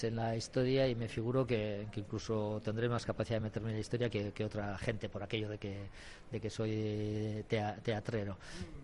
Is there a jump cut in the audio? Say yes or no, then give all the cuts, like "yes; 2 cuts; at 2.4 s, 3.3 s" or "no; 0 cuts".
no; 0 cuts